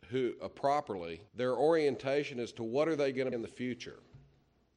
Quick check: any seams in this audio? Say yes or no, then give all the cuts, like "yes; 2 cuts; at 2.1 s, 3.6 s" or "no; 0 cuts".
yes; 2 cuts; at 1.3 s, 3.3 s